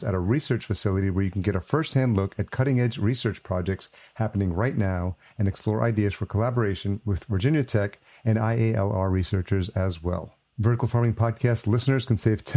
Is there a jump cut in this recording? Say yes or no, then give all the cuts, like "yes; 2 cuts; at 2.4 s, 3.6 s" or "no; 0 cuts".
no; 0 cuts